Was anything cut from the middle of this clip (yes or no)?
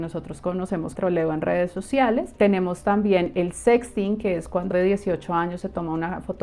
yes